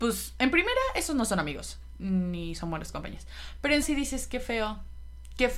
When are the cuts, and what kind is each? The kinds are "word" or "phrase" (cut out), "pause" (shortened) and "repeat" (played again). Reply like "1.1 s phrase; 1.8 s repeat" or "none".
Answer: 3.8 s word